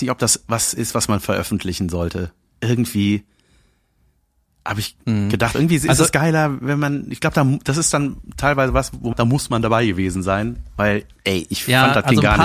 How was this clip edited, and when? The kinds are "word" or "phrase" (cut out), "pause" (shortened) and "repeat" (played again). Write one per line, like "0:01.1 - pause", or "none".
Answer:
0:05.5 - word
0:09.1 - word